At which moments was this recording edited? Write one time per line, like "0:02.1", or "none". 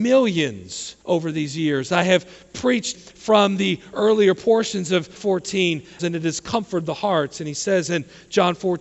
0:01.0
0:02.9
0:05.2
0:06.0